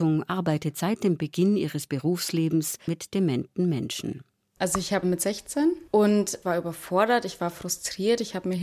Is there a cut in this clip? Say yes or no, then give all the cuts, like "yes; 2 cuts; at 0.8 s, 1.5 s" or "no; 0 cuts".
yes; 4 cuts; at 2.9 s, 5.0 s, 5.9 s, 6.4 s